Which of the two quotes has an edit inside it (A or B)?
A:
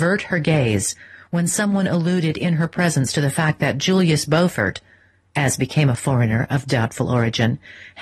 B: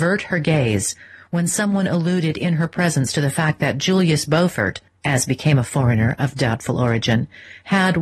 B